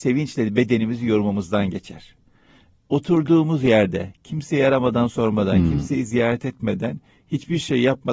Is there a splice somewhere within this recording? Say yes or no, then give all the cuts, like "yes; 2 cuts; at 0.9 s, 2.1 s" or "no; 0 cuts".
no; 0 cuts